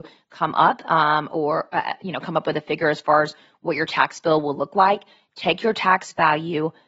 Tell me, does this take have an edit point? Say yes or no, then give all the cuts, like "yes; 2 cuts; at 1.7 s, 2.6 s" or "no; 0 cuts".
no; 0 cuts